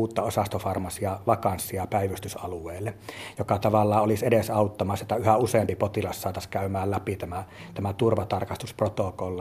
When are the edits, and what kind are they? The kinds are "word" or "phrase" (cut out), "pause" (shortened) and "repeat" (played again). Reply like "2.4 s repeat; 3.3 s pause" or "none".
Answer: none